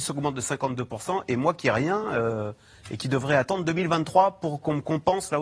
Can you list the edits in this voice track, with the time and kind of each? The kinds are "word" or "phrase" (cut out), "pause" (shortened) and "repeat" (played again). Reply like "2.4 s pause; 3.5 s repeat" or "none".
none